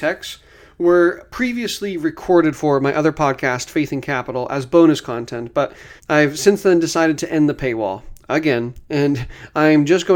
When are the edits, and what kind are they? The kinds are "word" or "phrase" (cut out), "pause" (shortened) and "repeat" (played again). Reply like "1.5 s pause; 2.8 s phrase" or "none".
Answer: 6.0 s pause